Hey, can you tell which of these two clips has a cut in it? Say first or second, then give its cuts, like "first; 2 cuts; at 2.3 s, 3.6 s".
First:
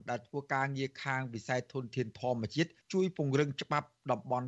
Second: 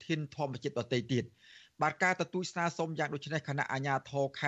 first; 1 cut; at 2.8 s